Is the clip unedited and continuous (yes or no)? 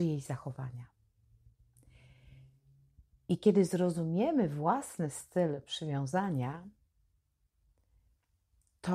yes